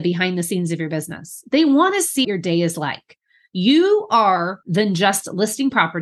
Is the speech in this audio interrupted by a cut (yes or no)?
yes